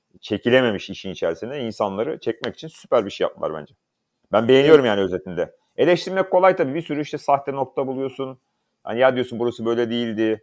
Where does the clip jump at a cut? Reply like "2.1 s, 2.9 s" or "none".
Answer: none

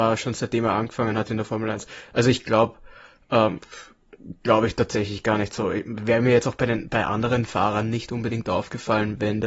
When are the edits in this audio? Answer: none

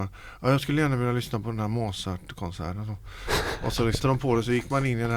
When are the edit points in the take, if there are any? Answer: 4.0 s

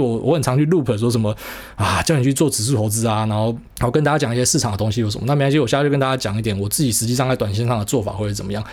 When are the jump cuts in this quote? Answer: 3.7 s

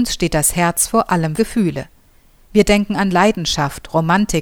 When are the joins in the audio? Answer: 1.4 s

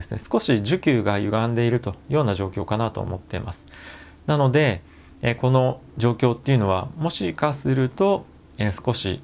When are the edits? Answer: 5.9 s

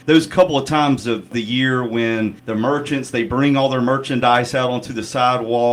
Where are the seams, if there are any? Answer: 2.4 s

